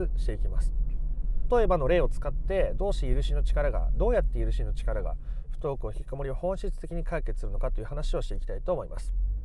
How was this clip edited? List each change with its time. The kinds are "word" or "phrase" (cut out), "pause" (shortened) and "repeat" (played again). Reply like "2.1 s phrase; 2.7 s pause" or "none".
1.5 s phrase